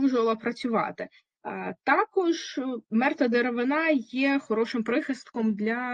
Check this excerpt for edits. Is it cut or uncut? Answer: cut